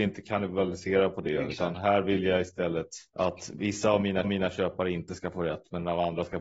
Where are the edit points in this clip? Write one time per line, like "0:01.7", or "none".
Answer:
0:03.1
0:04.2